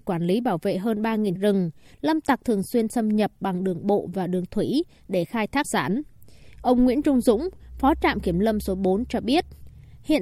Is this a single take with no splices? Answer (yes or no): no